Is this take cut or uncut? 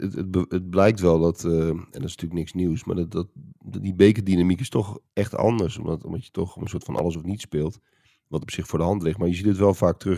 uncut